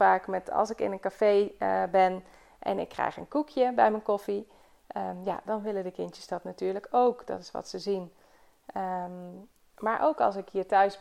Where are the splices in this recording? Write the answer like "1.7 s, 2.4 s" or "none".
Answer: none